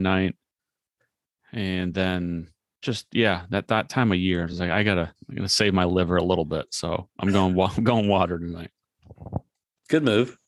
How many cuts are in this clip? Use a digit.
0